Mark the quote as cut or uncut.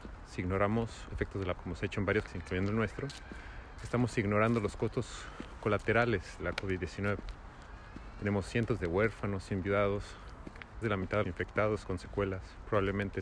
cut